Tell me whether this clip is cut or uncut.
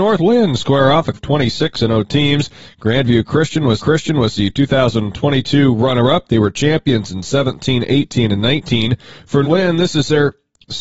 cut